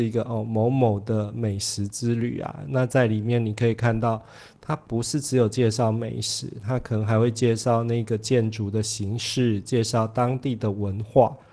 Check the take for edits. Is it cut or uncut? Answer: uncut